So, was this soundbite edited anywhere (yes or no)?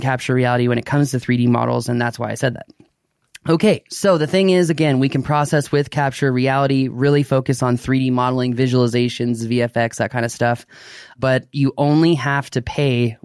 no